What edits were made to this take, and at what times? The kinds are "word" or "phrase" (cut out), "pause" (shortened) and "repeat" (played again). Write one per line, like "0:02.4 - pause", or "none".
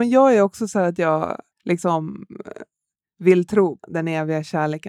0:01.5 - pause
0:03.8 - word